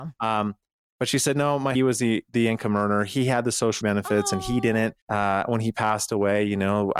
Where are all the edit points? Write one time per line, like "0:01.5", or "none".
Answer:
0:01.7
0:03.8
0:05.0